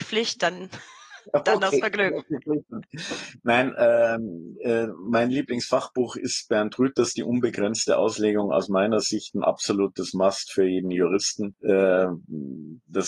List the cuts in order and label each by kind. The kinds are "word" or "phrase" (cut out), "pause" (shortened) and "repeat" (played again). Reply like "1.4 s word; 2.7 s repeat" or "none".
1.2 s pause